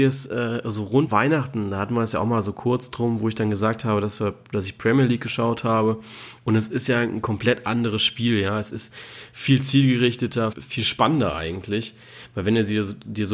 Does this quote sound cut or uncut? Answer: cut